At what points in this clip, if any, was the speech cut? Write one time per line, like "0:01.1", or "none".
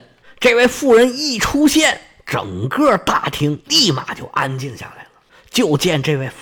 none

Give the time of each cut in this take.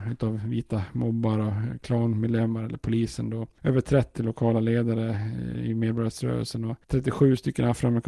0:04.1

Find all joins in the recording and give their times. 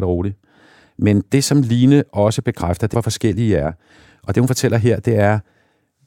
0:02.9

